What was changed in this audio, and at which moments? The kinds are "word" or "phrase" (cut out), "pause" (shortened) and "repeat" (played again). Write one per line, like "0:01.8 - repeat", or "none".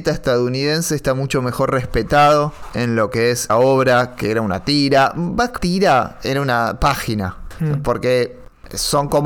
0:02.7 - word
0:03.5 - word
0:05.6 - word

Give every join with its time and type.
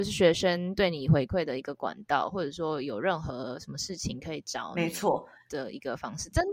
none

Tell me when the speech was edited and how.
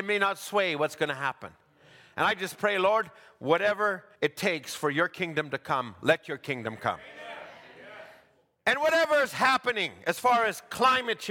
0:04.1 - pause

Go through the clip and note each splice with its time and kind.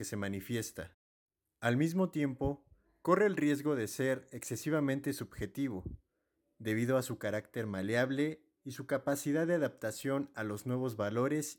none

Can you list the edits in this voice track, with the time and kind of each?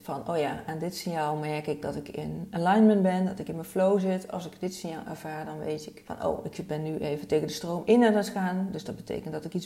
none

